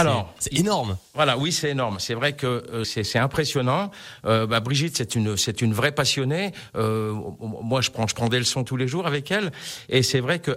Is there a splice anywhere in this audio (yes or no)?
yes